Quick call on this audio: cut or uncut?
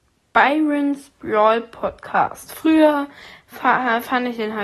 uncut